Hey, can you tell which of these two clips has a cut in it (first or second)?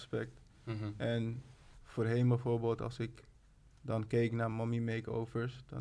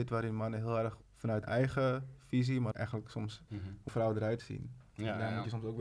second